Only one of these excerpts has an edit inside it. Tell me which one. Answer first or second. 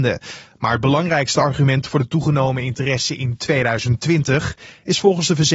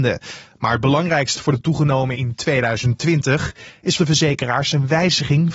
second